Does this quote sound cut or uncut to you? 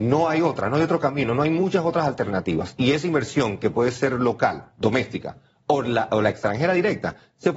uncut